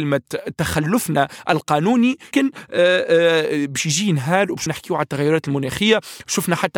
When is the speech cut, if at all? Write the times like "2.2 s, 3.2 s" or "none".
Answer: 2.3 s, 4.7 s

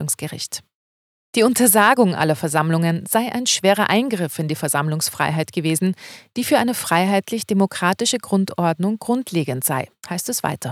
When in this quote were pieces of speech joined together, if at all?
none

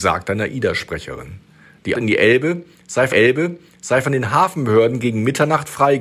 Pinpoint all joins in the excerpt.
1.9 s, 3.1 s

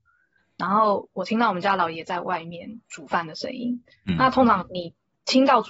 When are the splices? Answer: 2.9 s

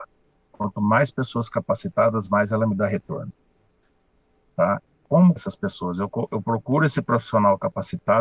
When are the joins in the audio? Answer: 5.4 s

